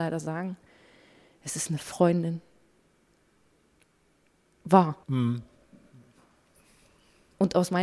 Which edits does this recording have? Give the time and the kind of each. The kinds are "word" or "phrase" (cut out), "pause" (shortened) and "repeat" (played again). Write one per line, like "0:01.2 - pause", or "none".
0:05.0 - pause